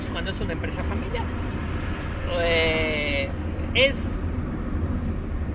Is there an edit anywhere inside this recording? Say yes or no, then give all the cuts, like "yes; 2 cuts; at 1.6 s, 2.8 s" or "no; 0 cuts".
yes; 1 cut; at 3.7 s